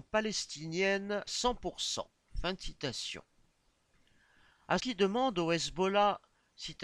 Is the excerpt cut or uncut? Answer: cut